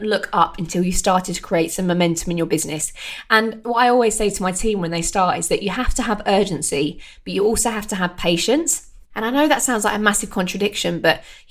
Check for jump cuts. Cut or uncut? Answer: cut